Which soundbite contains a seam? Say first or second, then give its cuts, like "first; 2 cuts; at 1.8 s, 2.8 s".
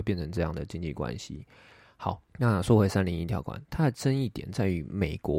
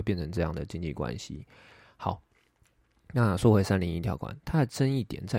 first; 1 cut; at 2.3 s